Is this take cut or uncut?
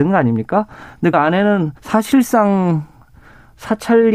cut